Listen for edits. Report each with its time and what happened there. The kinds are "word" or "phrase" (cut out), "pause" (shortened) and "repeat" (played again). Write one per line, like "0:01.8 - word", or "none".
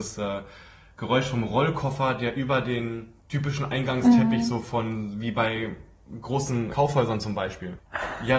0:03.2 - pause
0:06.7 - word